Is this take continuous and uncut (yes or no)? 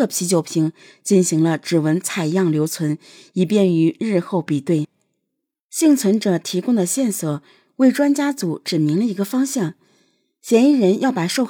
yes